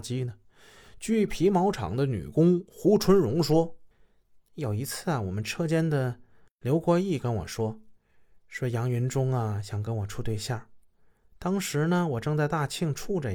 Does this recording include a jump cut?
no; 0 cuts

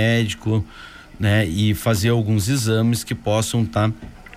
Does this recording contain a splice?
no; 0 cuts

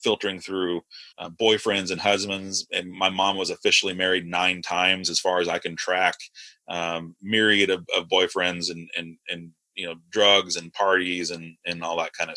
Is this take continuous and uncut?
no; 1 cut; at 1.1 s

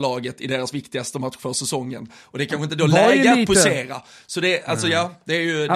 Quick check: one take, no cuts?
yes; 0 cuts

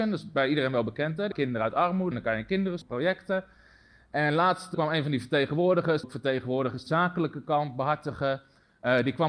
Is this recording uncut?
no; 6 cuts; at 1.3 s, 2.1 s, 2.8 s, 4.7 s, 6.0 s, 6.9 s

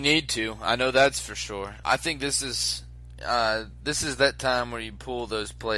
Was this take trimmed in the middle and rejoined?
no; 0 cuts

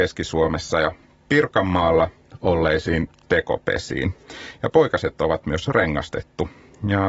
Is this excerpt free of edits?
yes; 0 cuts

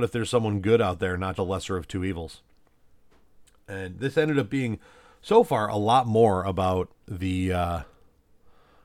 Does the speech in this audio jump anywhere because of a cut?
yes; 1 cut; at 1.4 s

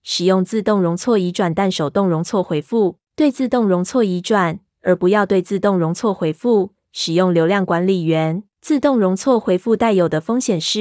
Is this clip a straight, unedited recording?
no; 2 cuts; at 3.0 s, 8.5 s

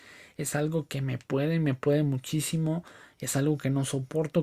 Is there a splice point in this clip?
no; 0 cuts

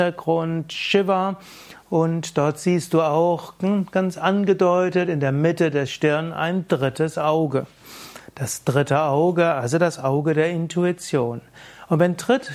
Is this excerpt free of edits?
yes; 0 cuts

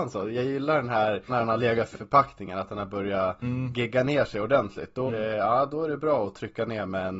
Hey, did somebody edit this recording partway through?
yes; 3 cuts; at 1.3 s, 1.9 s, 5.1 s

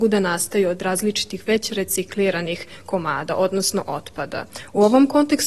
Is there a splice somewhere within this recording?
no; 0 cuts

